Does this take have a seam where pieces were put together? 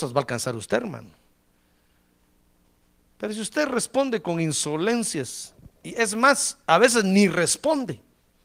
no; 0 cuts

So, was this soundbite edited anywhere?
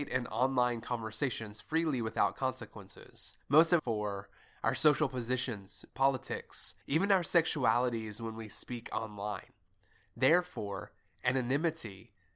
yes; 4 cuts; at 3.4 s, 3.8 s, 5.9 s, 6.8 s

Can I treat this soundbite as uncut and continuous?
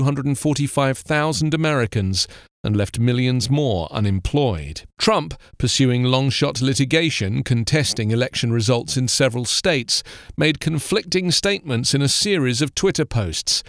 no; 1 cut; at 4.9 s

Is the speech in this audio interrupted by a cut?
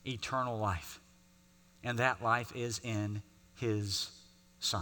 no; 0 cuts

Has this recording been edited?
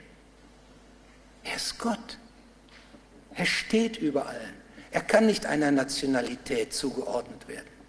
no; 0 cuts

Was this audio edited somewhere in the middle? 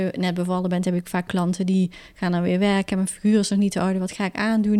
no; 0 cuts

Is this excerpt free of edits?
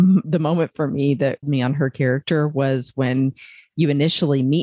no; 1 cut; at 1.4 s

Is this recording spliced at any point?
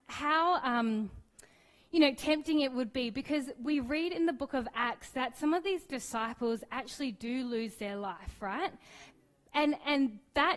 no; 0 cuts

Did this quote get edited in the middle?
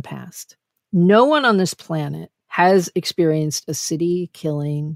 yes; 1 cut; at 2.4 s

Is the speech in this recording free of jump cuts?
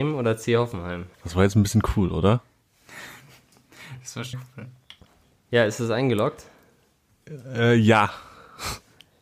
no; 3 cuts; at 1.1 s, 4.3 s, 5.1 s

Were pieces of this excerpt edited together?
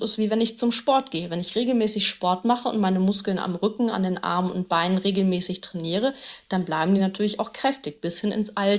no; 0 cuts

